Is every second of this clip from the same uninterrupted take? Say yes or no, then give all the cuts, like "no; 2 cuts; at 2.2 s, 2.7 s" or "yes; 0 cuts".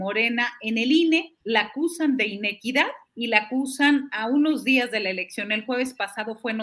no; 2 cuts; at 1.4 s, 3.1 s